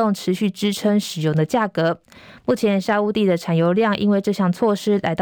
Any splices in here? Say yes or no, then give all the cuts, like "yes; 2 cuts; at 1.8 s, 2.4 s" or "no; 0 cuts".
no; 0 cuts